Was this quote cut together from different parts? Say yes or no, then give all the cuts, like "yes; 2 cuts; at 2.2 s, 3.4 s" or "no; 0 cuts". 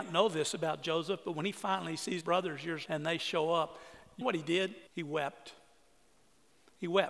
yes; 4 cuts; at 2.2 s, 2.9 s, 4.2 s, 4.9 s